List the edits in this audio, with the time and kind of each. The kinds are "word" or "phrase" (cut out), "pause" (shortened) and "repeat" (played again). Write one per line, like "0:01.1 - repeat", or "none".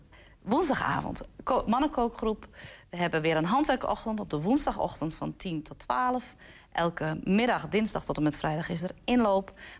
none